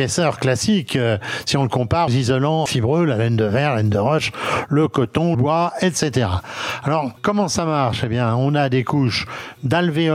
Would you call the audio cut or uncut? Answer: cut